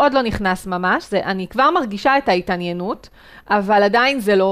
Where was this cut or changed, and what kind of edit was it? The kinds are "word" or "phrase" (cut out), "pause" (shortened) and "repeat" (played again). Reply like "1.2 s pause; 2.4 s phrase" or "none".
none